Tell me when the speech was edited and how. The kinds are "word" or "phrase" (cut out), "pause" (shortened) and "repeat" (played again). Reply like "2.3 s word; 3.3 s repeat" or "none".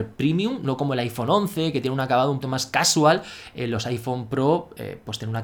2.4 s word